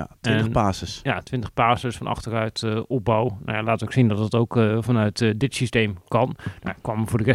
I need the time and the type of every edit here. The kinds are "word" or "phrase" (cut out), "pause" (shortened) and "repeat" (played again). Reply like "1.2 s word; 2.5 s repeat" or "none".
none